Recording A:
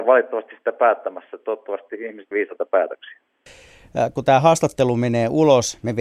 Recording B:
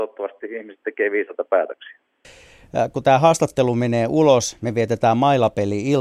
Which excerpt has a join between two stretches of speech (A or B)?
A